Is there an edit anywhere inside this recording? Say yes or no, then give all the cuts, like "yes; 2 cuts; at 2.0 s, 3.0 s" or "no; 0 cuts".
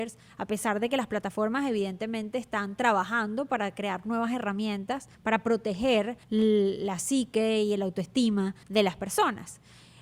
yes; 3 cuts; at 5.1 s, 6.2 s, 8.6 s